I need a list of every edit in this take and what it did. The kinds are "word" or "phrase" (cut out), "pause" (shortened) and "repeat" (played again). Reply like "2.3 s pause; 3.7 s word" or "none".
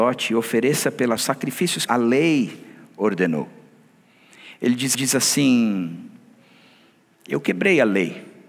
1.2 s phrase; 1.9 s word; 4.9 s repeat